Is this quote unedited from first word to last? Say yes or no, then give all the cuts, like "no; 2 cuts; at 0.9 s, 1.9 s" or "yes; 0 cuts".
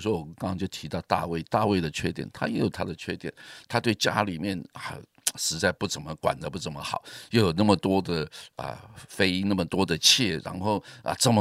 yes; 0 cuts